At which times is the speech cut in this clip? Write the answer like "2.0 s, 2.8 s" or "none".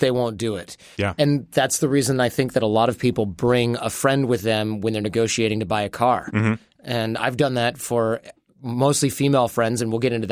none